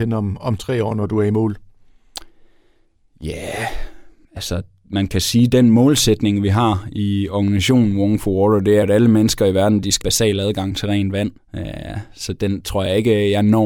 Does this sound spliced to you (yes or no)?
yes